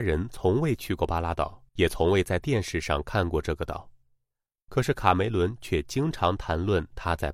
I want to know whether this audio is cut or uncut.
cut